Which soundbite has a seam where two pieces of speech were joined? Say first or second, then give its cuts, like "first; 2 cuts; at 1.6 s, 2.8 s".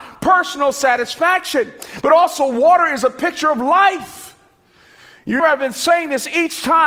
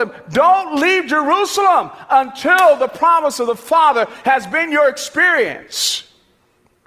first; 1 cut; at 5.4 s